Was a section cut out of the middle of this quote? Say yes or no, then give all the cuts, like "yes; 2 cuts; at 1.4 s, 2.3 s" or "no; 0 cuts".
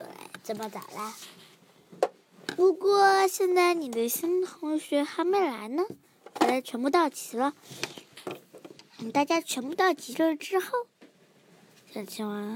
no; 0 cuts